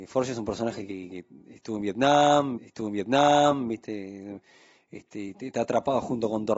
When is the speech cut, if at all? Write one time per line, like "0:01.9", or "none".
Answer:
0:01.4
0:02.6